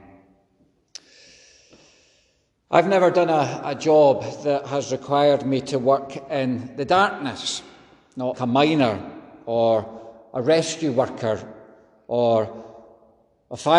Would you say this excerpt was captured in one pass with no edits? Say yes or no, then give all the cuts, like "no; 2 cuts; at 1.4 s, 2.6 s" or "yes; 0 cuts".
no; 1 cut; at 8.3 s